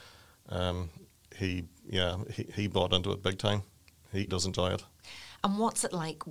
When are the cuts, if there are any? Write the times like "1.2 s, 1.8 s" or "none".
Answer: 2.5 s, 4.3 s